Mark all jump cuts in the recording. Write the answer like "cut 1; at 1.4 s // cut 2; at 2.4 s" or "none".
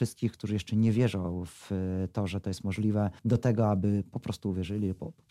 cut 1; at 3.2 s